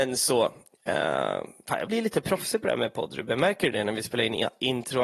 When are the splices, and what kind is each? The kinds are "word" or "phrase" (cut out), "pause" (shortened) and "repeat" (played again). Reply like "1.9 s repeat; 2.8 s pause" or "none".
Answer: 1.9 s word